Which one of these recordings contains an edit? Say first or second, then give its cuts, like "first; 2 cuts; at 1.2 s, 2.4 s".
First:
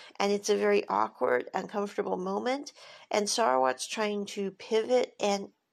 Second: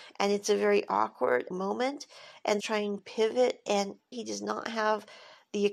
second; 4 cuts; at 1.5 s, 2.6 s, 3.0 s, 4.1 s